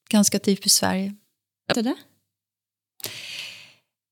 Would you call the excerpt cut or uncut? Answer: cut